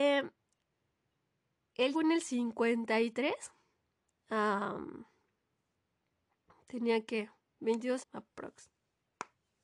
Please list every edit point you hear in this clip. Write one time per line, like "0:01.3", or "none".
0:01.9
0:08.0

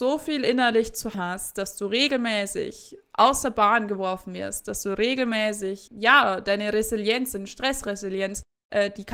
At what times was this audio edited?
0:01.1
0:05.9

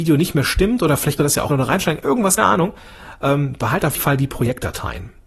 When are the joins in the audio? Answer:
0:01.2
0:01.5
0:02.4
0:04.0

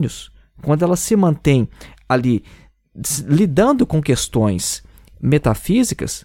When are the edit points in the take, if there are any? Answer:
none

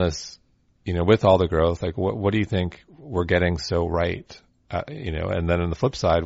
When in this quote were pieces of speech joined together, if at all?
none

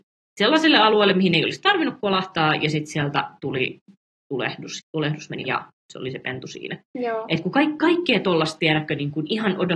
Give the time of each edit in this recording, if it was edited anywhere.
0:04.8
0:05.4

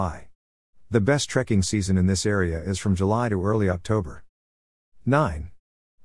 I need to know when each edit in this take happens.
none

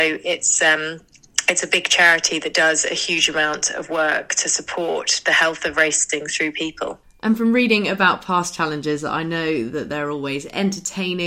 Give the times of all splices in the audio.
none

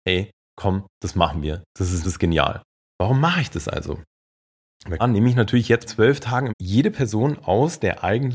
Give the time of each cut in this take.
0:02.0
0:02.7
0:05.0
0:05.9
0:06.5

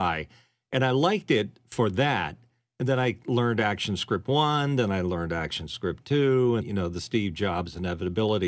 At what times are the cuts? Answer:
0:06.6

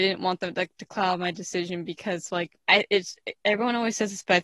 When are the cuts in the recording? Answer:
0:02.6

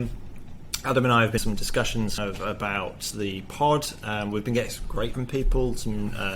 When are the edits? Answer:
0:01.4
0:02.2
0:05.1

